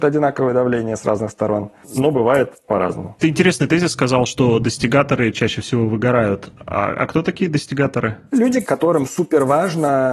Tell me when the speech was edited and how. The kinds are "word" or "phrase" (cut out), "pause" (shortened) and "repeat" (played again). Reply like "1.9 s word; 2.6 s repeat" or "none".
1.8 s pause

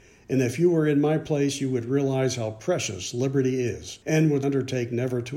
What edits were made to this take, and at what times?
4.0 s pause; 4.4 s word

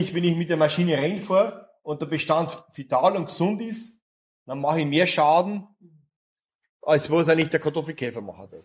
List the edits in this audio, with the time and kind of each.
none

